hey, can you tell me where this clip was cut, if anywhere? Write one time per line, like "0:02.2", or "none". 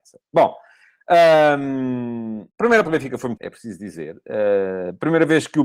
0:02.5
0:02.8
0:03.4